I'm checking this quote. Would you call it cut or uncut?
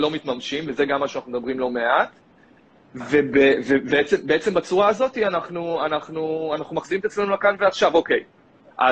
uncut